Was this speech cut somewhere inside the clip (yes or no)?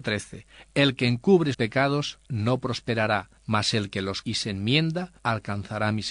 yes